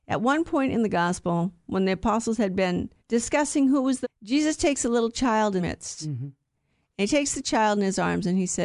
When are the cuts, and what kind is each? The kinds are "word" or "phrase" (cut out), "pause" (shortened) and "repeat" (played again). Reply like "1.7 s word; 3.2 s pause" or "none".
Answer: 3.0 s pause; 4.0 s phrase; 5.6 s word

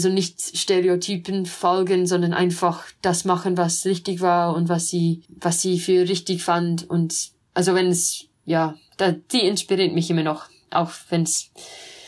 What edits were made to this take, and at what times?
5.2 s pause; 7.5 s pause

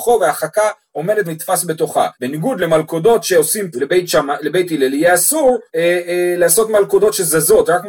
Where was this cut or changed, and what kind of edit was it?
1.2 s word; 2.1 s pause; 3.7 s phrase; 5.7 s pause

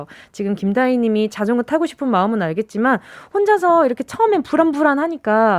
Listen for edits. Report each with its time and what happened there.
none

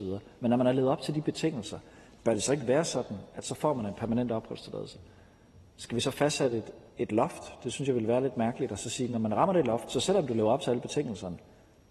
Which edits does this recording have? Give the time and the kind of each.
none

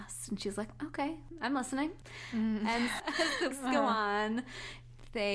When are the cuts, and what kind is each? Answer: 3.0 s word; 3.5 s word

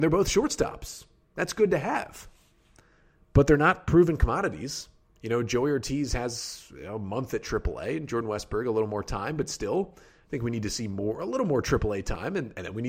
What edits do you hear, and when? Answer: none

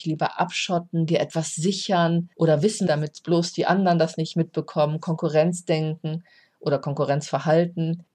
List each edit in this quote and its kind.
2.3 s pause; 2.9 s phrase

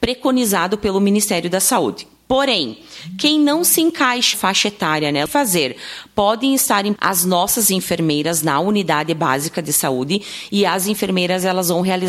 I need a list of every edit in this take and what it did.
4.3 s word; 5.3 s phrase; 7.0 s word

